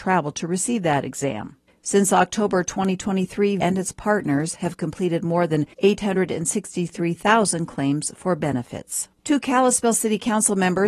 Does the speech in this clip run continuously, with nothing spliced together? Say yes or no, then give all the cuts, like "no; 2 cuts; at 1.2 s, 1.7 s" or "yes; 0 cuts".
no; 3 cuts; at 3.6 s, 5.7 s, 9.2 s